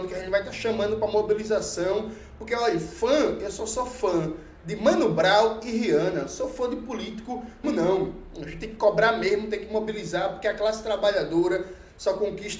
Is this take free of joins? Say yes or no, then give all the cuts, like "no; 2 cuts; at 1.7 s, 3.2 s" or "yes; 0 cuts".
no; 1 cut; at 7.6 s